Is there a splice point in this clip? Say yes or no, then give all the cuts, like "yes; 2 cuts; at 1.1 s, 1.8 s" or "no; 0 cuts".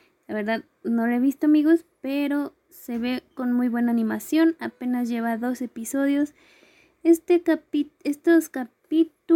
no; 0 cuts